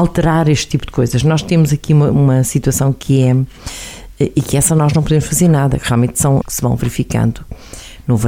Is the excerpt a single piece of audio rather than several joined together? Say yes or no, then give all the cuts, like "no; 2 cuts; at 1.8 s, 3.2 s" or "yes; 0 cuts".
no; 1 cut; at 6.4 s